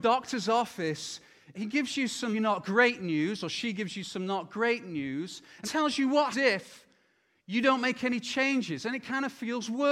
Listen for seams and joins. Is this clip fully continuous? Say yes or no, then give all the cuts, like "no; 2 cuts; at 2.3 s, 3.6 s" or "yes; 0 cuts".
no; 4 cuts; at 1.5 s, 2.3 s, 5.6 s, 6.3 s